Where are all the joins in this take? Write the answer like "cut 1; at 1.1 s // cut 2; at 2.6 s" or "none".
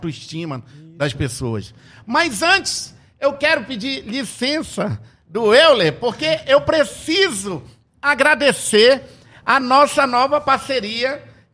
none